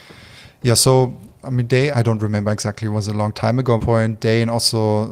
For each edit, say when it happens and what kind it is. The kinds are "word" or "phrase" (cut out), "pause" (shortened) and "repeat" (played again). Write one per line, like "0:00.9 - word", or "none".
0:01.9 - word
0:03.8 - phrase